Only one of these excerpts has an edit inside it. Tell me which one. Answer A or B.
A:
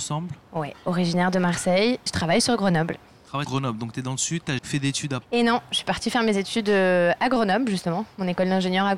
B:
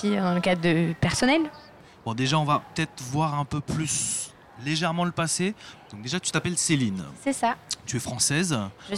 A